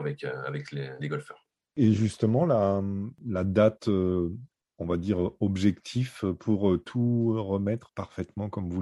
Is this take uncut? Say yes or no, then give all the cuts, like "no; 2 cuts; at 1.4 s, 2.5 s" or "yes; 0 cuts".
yes; 0 cuts